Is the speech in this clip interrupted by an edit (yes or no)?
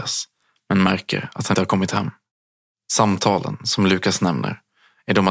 yes